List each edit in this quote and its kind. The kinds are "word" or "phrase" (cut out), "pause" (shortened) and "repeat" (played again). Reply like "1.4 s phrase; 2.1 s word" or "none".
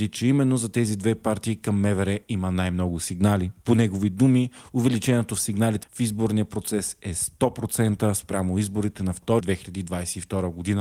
5.8 s phrase; 9.4 s word